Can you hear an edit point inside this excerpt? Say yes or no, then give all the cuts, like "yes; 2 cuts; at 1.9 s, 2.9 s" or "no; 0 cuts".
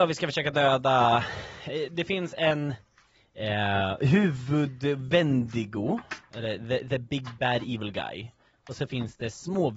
no; 0 cuts